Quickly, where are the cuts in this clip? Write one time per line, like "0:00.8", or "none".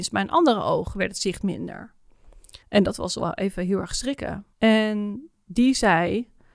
0:02.6
0:04.5